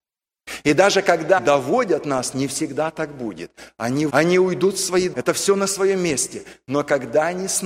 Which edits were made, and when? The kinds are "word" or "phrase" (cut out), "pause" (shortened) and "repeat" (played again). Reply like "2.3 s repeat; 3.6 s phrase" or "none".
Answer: 1.4 s word; 2.3 s word; 4.1 s word; 5.1 s word